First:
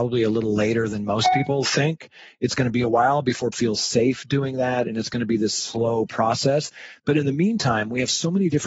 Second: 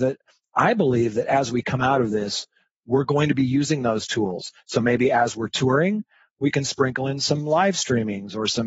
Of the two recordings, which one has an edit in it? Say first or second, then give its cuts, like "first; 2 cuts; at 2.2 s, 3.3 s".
first; 1 cut; at 3.5 s